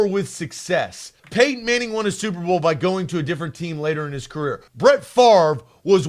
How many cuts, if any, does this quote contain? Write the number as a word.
two